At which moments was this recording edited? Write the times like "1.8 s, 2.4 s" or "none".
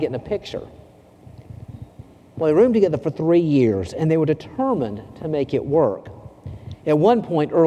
none